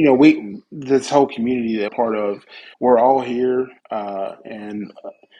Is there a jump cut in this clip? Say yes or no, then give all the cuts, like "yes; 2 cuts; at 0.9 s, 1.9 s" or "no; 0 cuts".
yes; 3 cuts; at 1.9 s, 2.7 s, 3.8 s